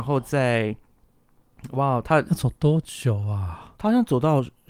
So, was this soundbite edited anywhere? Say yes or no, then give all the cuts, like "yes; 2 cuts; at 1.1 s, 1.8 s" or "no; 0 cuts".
no; 0 cuts